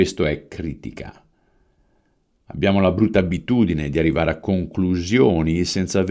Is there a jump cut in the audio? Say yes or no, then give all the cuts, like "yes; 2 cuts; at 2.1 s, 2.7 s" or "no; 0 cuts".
no; 0 cuts